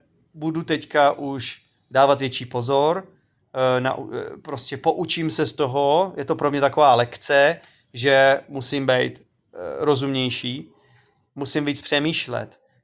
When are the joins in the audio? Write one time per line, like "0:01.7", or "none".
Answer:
none